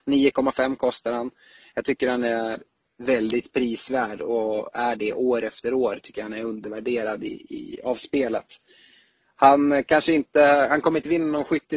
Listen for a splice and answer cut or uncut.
uncut